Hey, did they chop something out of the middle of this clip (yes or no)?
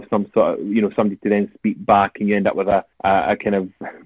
yes